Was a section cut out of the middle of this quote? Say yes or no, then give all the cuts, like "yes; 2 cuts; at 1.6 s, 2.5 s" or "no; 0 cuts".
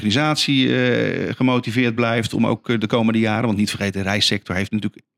no; 0 cuts